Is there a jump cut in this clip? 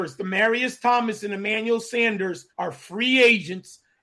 yes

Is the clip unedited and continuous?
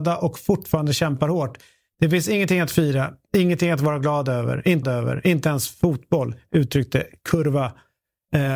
no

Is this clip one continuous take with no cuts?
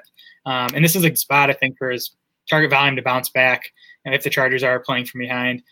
no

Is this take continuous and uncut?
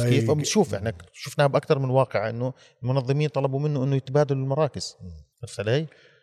no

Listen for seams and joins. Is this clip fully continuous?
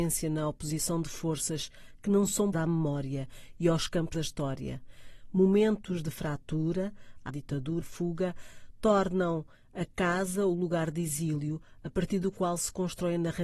no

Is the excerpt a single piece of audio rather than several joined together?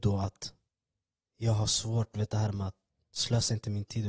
yes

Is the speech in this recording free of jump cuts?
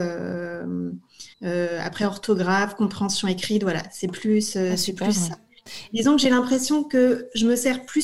no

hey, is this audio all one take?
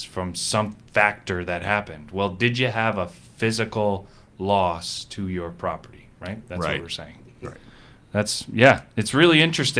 yes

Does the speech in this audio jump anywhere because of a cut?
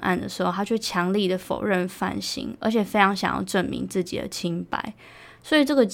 no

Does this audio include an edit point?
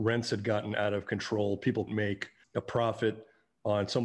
yes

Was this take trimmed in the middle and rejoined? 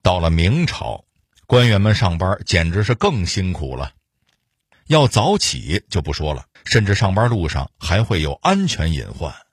yes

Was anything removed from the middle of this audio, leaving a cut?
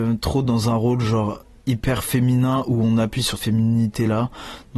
yes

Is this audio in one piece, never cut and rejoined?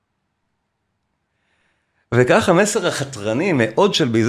yes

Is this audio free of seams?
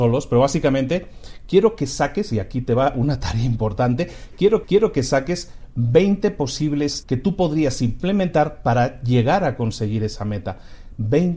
no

